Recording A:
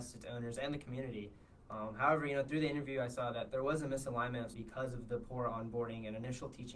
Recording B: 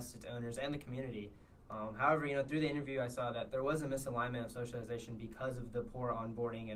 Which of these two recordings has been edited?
A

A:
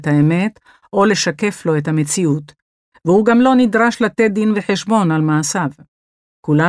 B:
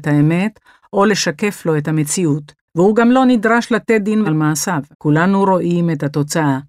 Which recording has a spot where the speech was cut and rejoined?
B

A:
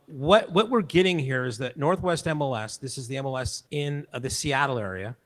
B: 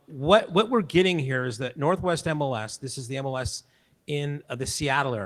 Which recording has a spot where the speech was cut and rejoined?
A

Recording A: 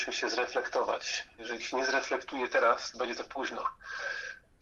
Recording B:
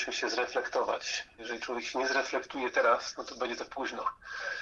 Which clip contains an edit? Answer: A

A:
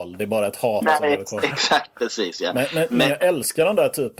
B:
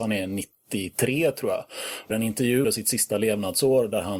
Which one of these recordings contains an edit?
B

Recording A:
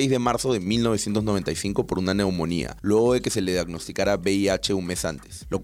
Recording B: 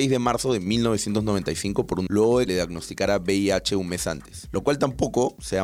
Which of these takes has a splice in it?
B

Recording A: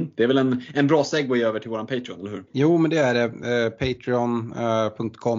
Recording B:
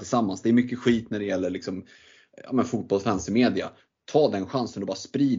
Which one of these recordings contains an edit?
A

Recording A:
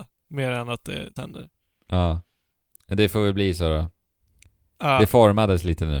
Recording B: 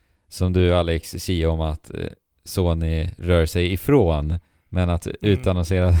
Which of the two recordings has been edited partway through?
A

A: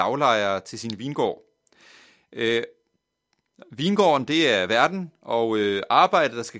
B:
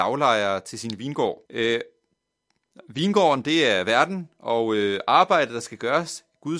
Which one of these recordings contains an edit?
B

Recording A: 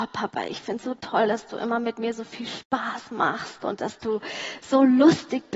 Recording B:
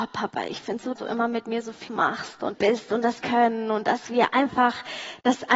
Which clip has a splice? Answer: B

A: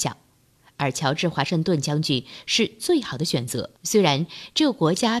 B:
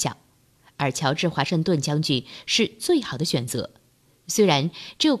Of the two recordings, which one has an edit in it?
A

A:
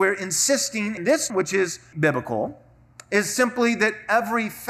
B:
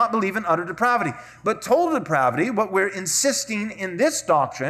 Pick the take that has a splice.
A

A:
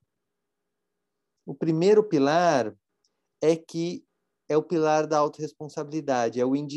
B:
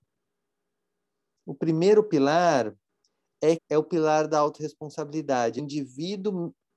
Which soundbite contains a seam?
B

